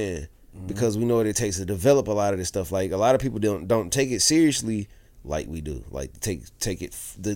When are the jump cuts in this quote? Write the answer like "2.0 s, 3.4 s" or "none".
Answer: none